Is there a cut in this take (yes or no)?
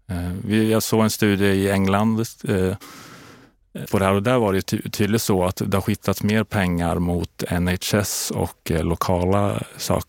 yes